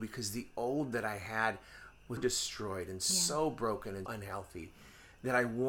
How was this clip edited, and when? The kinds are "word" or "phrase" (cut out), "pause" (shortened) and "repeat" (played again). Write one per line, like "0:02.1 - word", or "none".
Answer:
0:02.2 - word
0:04.1 - word